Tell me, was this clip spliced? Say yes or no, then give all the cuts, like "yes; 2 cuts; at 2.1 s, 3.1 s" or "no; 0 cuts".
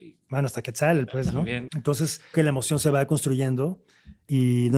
yes; 3 cuts; at 1.1 s, 1.7 s, 2.3 s